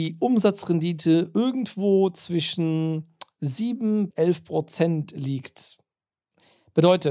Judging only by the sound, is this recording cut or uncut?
cut